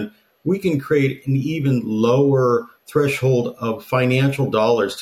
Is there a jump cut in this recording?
no; 0 cuts

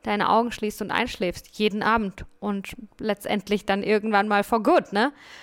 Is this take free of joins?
yes; 0 cuts

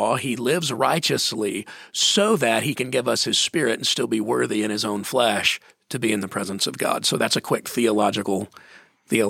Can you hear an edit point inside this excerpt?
no; 0 cuts

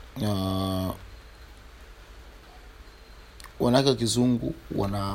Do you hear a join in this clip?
no; 0 cuts

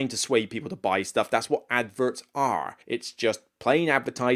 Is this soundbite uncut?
no; 1 cut; at 2.8 s

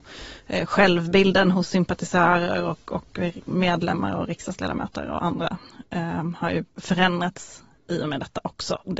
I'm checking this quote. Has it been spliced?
no; 0 cuts

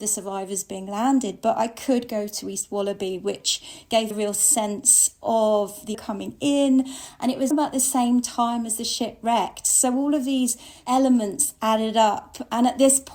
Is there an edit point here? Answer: yes; 3 cuts; at 4.1 s, 5.9 s, 7.5 s

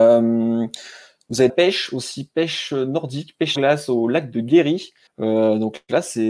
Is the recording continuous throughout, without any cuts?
no; 3 cuts; at 1.5 s, 3.6 s, 5.1 s

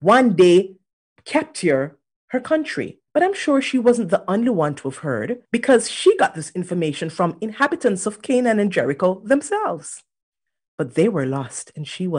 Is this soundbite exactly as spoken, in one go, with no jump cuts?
no; 3 cuts; at 0.9 s, 3.1 s, 5.5 s

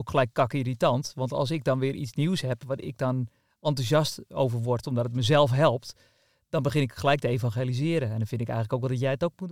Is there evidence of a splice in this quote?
no; 0 cuts

